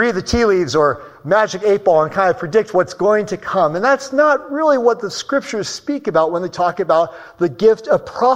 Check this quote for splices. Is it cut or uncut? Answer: uncut